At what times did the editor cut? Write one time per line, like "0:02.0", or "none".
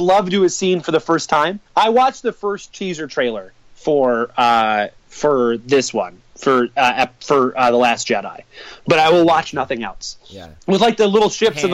0:01.7
0:05.0
0:06.3
0:10.6